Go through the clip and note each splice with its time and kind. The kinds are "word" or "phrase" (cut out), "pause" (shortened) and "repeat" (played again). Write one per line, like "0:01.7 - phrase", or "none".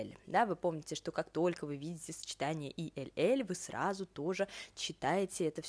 none